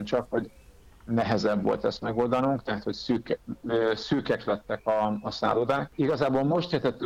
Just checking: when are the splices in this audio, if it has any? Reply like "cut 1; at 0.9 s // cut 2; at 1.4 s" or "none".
none